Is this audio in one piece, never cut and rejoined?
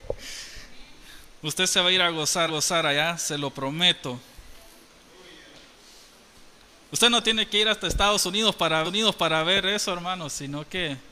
no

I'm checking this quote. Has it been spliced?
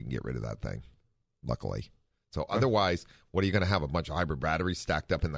no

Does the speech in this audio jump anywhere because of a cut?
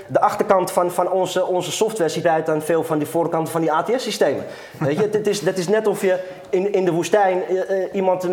yes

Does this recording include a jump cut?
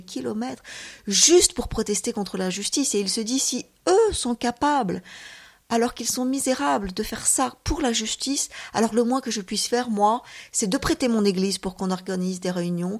no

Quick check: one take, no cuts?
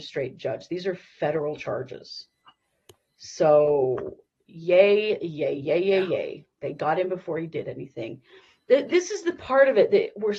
yes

